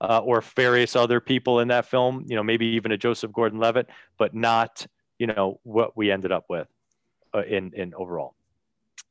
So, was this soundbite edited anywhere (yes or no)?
no